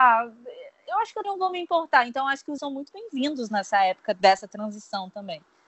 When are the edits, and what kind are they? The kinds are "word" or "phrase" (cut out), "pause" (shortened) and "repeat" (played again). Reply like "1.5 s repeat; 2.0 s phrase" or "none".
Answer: 1.2 s word; 2.6 s word